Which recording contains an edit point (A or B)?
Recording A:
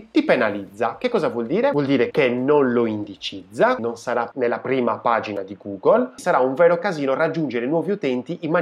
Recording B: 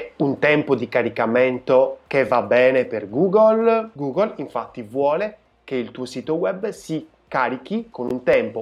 A